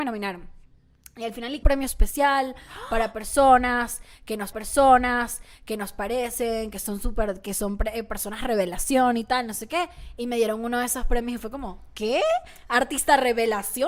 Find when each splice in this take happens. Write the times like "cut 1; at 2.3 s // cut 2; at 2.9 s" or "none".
cut 1; at 1.6 s // cut 2; at 4.5 s